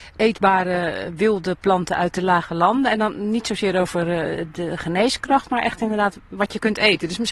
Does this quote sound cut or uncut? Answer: uncut